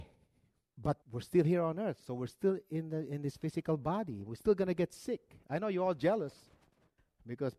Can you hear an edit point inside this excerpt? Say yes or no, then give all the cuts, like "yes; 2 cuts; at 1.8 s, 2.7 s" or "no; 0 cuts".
yes; 1 cut; at 1.0 s